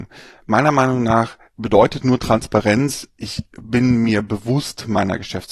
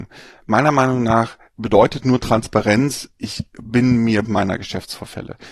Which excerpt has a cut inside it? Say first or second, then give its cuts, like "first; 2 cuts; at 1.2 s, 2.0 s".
second; 1 cut; at 4.2 s